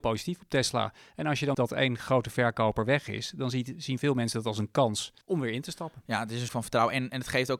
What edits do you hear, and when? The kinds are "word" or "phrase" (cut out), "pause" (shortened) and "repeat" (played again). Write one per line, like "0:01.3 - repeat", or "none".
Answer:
0:01.5 - word
0:05.2 - pause
0:06.5 - phrase